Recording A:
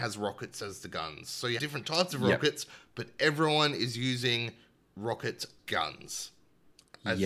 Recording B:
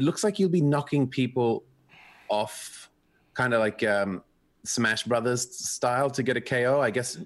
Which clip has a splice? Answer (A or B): A